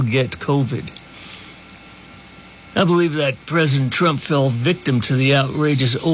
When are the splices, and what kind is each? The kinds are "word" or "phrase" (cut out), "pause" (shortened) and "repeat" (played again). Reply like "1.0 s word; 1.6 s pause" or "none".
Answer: none